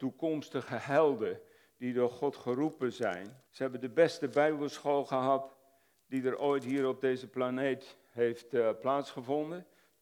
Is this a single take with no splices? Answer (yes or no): no